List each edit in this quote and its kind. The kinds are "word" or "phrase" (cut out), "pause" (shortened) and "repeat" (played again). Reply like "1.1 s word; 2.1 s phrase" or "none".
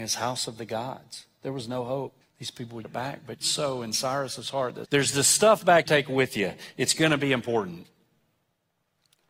2.2 s pause; 2.8 s word; 3.4 s phrase; 4.8 s phrase; 5.9 s phrase